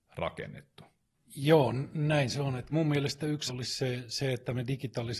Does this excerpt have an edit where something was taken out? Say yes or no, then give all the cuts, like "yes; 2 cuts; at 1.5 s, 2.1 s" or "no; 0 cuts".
yes; 2 cuts; at 2.7 s, 3.5 s